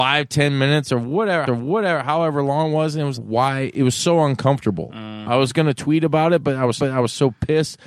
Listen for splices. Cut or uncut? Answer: cut